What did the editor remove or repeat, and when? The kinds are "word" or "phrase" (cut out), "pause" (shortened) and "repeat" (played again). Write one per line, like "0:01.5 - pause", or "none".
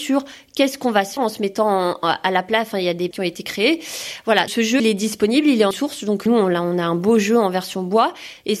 0:01.2 - word
0:03.1 - word
0:04.5 - word
0:04.8 - word
0:05.7 - word
0:06.3 - word